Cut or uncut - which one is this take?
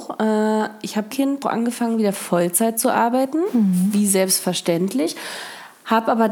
cut